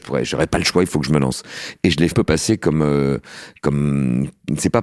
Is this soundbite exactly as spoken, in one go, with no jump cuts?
no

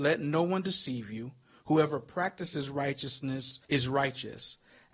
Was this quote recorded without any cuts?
no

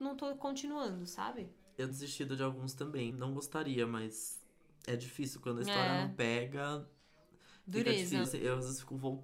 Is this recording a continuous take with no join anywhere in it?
no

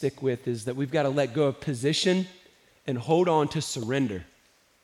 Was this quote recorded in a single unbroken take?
yes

